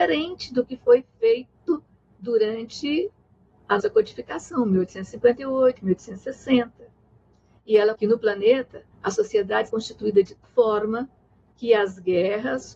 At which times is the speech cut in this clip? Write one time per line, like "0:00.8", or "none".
0:03.8
0:07.9
0:08.9
0:09.7
0:10.4